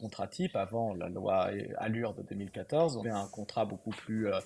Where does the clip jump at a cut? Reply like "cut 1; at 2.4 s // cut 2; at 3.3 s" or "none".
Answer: cut 1; at 3.0 s

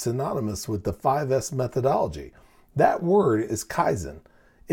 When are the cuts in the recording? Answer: none

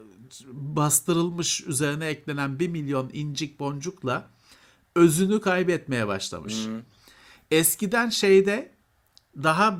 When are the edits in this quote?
none

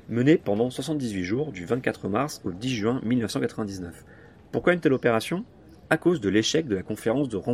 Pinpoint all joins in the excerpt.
none

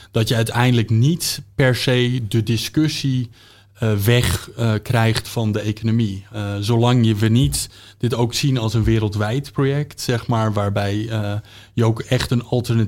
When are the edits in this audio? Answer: none

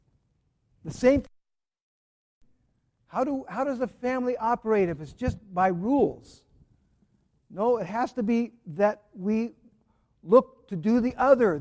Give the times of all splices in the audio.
none

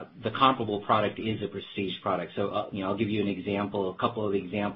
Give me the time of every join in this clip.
none

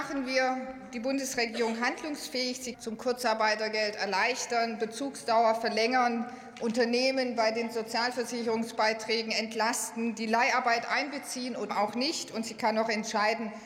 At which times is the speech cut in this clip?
cut 1; at 2.7 s // cut 2; at 11.7 s

